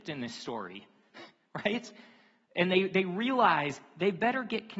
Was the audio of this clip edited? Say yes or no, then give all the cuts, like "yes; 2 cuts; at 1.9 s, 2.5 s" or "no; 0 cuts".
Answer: no; 0 cuts